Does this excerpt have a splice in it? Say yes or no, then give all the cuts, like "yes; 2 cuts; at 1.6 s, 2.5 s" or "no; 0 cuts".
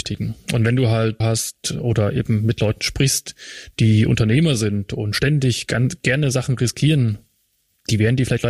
yes; 1 cut; at 1.2 s